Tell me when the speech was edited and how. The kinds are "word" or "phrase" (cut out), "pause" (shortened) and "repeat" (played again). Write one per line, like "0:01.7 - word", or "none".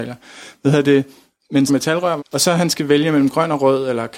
0:01.7 - phrase
0:02.2 - phrase